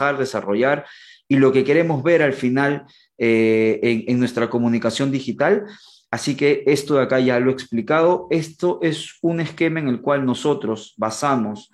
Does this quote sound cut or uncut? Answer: uncut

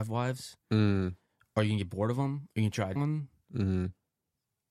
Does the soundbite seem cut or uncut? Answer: cut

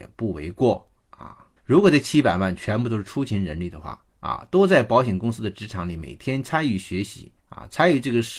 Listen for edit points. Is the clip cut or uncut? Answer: cut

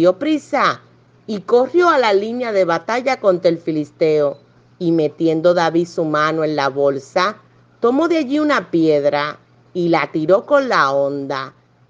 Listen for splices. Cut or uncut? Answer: uncut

